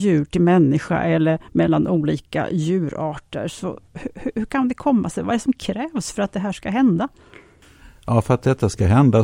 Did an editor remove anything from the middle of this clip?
no; 0 cuts

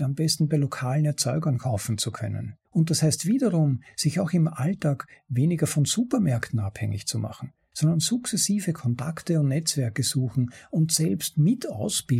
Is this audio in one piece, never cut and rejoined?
no; 1 cut; at 2.6 s

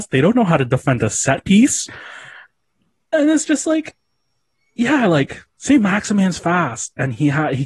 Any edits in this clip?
no; 0 cuts

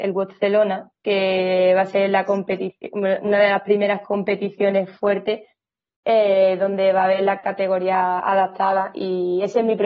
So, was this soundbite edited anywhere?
no; 0 cuts

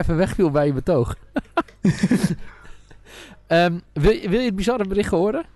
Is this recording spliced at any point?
yes; 1 cut; at 3.9 s

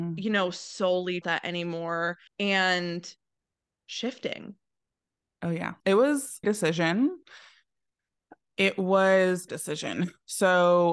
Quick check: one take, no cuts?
no; 5 cuts; at 1.2 s, 2.3 s, 5.8 s, 6.4 s, 9.5 s

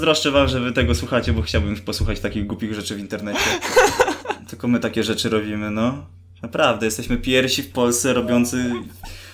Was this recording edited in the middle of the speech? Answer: no; 0 cuts

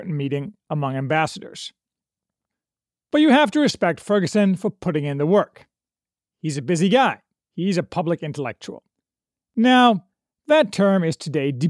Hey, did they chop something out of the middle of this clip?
no; 0 cuts

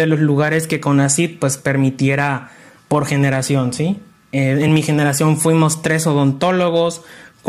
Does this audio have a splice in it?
no; 0 cuts

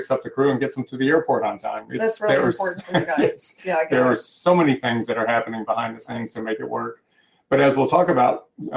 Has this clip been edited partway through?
no; 0 cuts

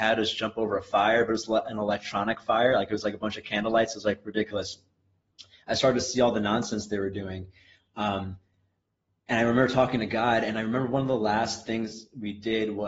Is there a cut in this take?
no; 0 cuts

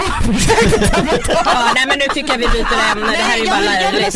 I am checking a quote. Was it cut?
no; 0 cuts

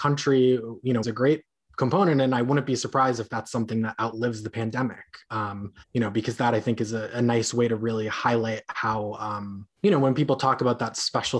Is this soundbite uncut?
no; 3 cuts; at 1.0 s, 5.8 s, 9.8 s

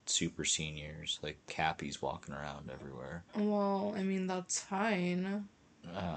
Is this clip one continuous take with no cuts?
no; 2 cuts; at 1.5 s, 3.3 s

